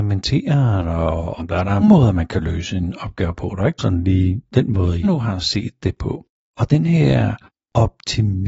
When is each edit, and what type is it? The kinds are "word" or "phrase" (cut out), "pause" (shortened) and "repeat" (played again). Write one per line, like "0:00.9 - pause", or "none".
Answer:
0:01.4 - word
0:01.8 - word
0:03.8 - word
0:05.0 - word
0:07.5 - pause